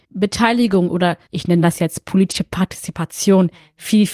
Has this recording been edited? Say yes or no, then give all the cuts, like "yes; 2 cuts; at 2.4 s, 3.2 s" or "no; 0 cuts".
no; 0 cuts